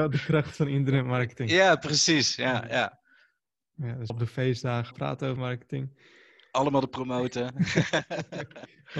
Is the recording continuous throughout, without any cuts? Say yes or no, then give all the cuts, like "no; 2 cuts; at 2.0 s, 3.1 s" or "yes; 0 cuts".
no; 4 cuts; at 4.1 s, 4.9 s, 5.4 s, 6.9 s